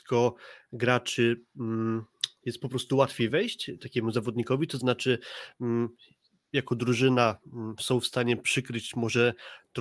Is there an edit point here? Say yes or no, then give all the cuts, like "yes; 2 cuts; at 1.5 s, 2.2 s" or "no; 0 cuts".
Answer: no; 0 cuts